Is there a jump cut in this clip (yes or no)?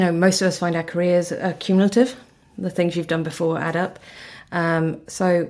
no